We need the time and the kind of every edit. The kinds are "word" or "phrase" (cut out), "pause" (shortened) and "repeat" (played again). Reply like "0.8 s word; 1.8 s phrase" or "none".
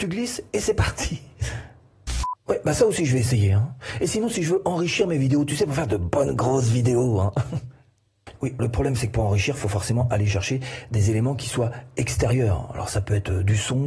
8.6 s word